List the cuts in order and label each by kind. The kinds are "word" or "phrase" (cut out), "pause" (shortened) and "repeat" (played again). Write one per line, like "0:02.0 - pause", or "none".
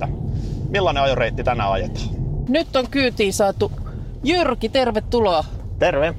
none